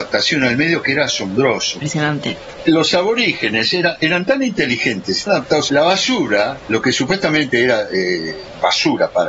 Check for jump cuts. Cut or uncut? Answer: cut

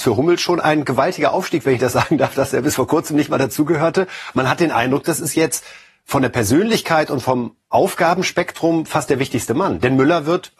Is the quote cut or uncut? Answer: uncut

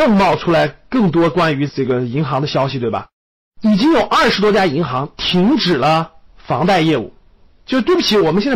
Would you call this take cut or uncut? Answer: uncut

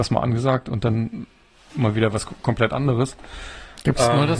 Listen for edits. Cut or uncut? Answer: uncut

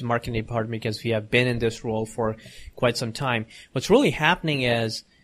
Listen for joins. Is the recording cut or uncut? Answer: uncut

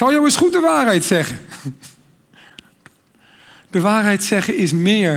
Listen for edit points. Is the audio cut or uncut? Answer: uncut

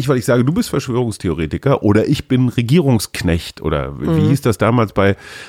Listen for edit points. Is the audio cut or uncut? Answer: uncut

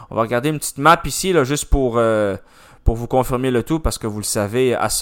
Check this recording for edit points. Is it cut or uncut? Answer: uncut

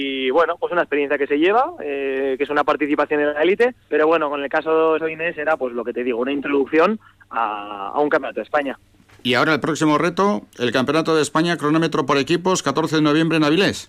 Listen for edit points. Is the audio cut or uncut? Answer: cut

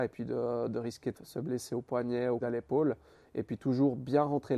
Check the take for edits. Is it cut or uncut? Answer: cut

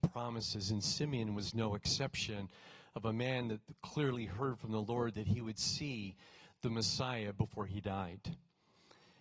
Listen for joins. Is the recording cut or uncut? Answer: uncut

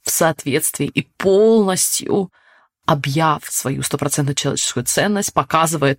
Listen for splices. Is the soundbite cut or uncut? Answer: uncut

